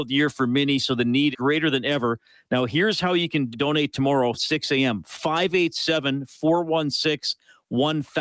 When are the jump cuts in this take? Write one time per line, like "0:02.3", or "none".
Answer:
0:01.3
0:03.5
0:04.3

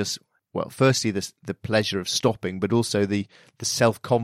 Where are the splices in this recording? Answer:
none

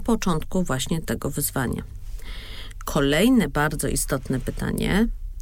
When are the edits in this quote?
none

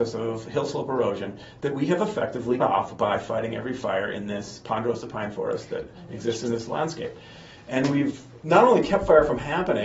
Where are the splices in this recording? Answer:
0:02.6

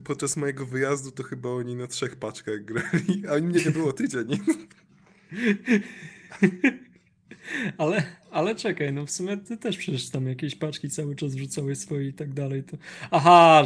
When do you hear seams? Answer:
none

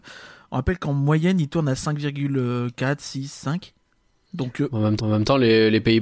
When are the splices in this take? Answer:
0:05.0

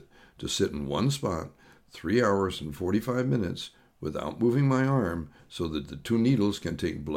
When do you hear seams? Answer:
none

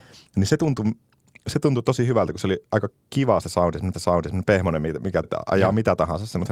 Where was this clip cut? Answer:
0:03.9
0:05.2

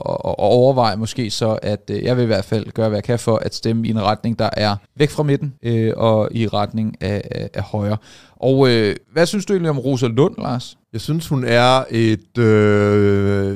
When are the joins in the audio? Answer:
0:04.9
0:05.6
0:09.0
0:10.8

